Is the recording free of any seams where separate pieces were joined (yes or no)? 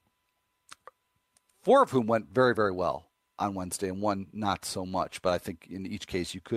yes